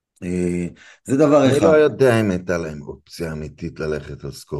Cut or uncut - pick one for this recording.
uncut